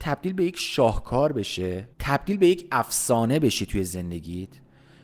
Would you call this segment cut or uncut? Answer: cut